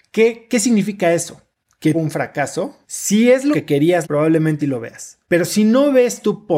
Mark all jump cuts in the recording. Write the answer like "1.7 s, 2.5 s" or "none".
1.9 s, 2.8 s, 3.5 s, 4.0 s, 4.6 s, 5.2 s